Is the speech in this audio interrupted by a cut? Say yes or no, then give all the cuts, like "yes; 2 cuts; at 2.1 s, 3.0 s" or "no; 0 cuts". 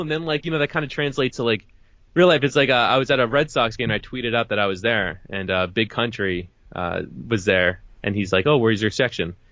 no; 0 cuts